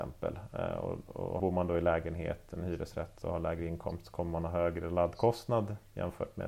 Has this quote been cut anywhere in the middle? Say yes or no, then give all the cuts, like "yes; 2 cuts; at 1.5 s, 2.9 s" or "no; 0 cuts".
yes; 1 cut; at 1.4 s